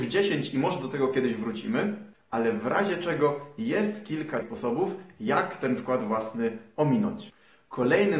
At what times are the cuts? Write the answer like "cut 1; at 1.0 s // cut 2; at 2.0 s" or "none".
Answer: cut 1; at 4.4 s